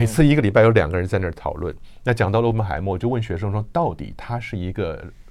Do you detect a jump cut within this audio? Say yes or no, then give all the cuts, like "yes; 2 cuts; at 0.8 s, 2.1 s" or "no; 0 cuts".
no; 0 cuts